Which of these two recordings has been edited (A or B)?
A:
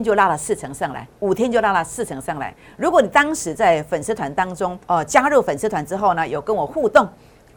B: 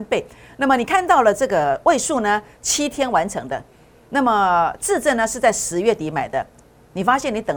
A